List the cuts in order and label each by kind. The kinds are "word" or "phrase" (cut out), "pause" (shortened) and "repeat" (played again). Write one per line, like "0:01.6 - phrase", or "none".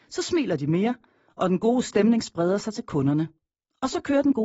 none